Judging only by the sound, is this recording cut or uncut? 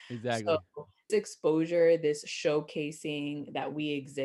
cut